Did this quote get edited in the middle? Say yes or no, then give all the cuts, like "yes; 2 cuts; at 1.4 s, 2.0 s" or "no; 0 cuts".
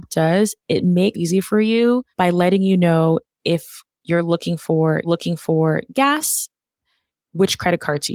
yes; 3 cuts; at 1.1 s, 2.1 s, 5.0 s